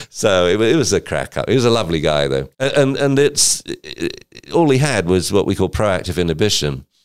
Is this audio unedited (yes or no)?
no